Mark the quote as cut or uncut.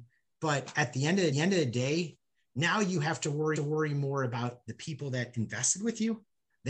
cut